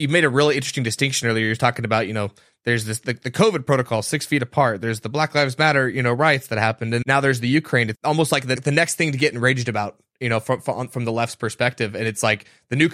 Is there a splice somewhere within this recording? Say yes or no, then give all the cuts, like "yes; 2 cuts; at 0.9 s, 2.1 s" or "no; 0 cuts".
yes; 3 cuts; at 7.0 s, 7.9 s, 8.6 s